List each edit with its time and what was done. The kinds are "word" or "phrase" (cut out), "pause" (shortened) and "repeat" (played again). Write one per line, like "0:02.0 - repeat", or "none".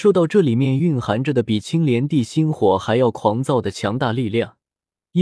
none